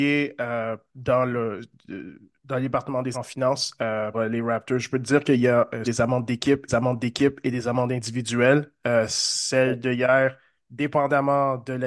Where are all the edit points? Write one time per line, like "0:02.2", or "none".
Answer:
0:03.1
0:04.1
0:05.8
0:06.7